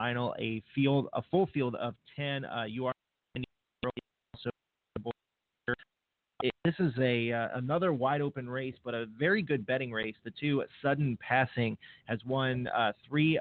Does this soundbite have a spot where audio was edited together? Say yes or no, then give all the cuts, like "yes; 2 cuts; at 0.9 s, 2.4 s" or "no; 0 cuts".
no; 0 cuts